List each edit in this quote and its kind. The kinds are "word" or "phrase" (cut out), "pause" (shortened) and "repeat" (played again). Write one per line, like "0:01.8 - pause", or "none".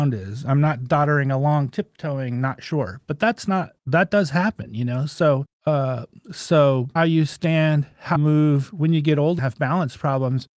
0:03.8 - pause
0:05.5 - pause
0:07.0 - word
0:08.2 - word
0:09.4 - word